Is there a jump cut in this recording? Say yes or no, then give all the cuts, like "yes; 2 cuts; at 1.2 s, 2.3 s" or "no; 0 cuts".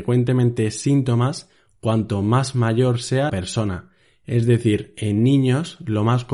yes; 1 cut; at 3.3 s